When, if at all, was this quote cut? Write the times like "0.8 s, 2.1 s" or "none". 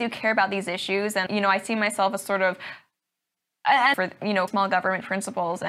1.3 s, 3.9 s, 4.5 s